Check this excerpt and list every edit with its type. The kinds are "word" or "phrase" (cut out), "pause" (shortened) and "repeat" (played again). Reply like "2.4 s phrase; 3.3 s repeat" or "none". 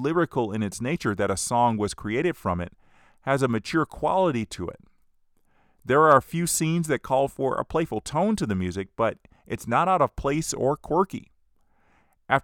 none